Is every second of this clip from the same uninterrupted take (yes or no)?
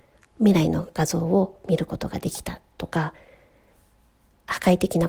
yes